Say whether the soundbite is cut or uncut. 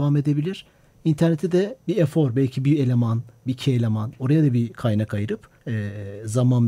cut